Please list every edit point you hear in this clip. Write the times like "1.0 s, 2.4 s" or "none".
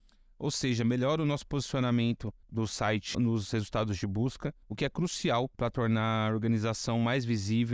2.4 s, 3.1 s, 4.6 s, 5.5 s